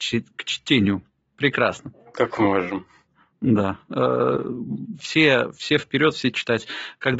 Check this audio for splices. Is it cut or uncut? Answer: uncut